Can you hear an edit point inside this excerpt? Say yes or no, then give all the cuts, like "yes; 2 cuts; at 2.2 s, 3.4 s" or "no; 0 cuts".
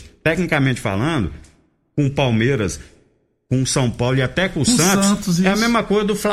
no; 0 cuts